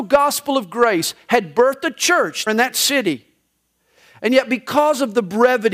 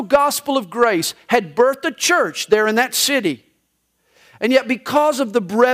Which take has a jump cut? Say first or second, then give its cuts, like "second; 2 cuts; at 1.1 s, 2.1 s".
first; 1 cut; at 2.5 s